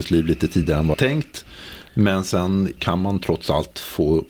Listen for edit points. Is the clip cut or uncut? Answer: cut